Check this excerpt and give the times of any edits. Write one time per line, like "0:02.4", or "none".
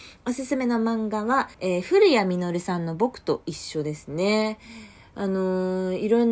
0:01.5

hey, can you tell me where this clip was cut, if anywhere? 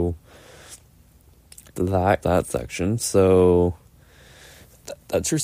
0:01.7
0:02.2

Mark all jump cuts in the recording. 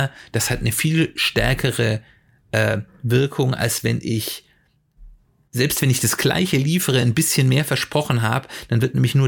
none

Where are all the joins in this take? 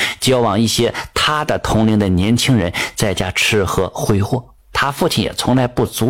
0:04.6

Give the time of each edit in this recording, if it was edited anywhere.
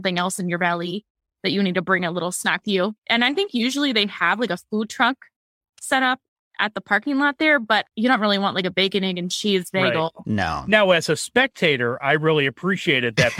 0:02.6

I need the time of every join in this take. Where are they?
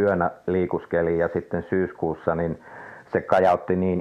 none

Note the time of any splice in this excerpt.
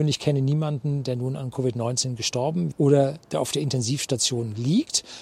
0:02.7
0:03.2

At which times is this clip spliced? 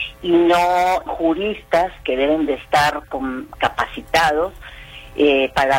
0:01.1

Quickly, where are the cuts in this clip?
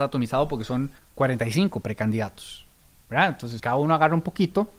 0:01.0
0:03.6

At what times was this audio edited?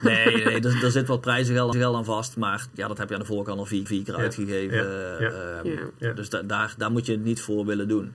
0:01.7
0:03.9

